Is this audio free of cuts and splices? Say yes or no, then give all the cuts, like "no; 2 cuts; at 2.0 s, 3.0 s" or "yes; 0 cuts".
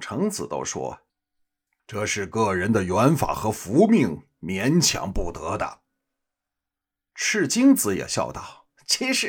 yes; 0 cuts